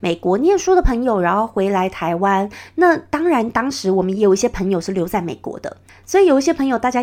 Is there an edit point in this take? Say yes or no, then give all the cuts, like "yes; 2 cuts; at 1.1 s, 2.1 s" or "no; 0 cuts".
yes; 1 cut; at 5.9 s